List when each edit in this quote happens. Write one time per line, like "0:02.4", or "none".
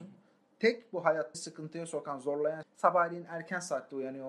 0:01.3
0:02.6